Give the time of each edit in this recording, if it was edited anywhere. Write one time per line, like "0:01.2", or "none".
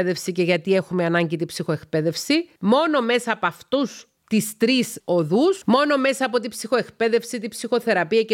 0:02.6
0:04.2
0:05.0